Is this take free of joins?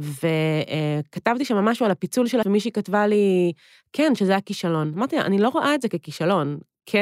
no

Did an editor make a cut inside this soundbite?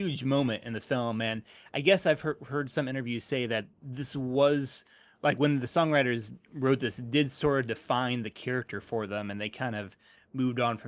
no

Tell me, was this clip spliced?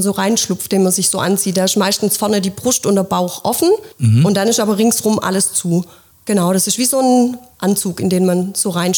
yes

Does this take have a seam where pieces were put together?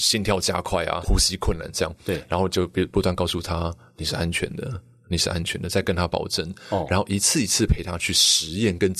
yes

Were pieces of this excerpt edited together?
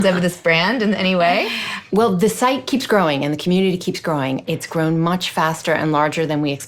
no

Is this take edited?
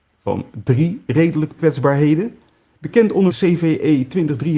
yes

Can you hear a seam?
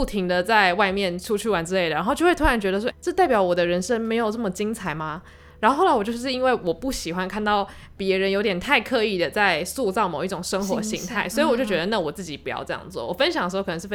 yes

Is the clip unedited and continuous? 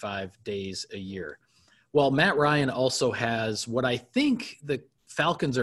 yes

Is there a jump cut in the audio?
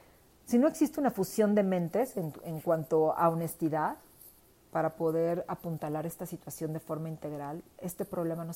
no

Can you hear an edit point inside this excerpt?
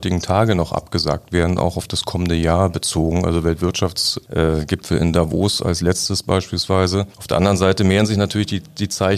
yes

